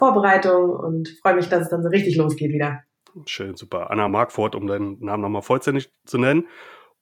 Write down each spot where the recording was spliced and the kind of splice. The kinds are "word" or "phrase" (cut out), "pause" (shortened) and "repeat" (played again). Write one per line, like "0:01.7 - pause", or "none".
none